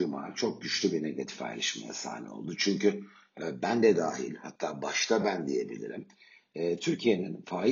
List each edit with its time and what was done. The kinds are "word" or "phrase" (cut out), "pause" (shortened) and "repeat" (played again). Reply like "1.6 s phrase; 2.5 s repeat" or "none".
none